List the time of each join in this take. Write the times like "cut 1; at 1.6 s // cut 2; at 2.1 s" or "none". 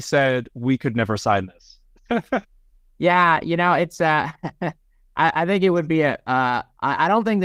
cut 1; at 2.4 s